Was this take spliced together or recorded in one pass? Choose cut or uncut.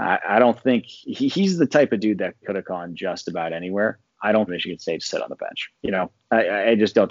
cut